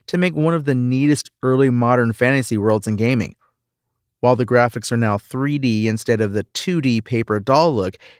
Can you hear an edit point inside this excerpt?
no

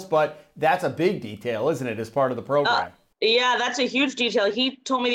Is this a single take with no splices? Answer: yes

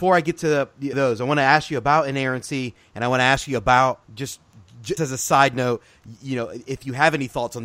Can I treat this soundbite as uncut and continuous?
no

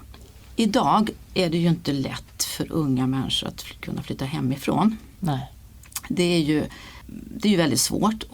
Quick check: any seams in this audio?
no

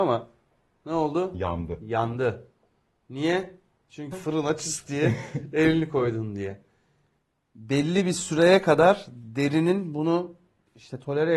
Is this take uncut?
no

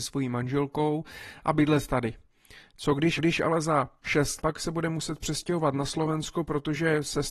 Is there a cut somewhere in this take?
yes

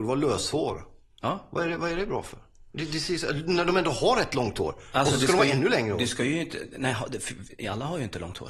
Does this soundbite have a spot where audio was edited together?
no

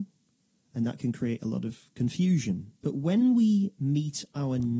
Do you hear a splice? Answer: yes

